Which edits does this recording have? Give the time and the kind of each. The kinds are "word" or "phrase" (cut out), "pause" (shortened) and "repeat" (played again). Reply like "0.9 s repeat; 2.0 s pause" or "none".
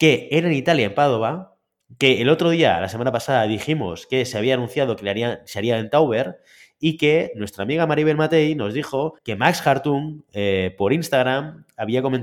9.2 s pause